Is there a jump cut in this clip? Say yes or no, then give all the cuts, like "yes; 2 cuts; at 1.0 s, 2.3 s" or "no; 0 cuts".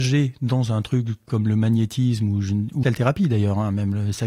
yes; 1 cut; at 2.8 s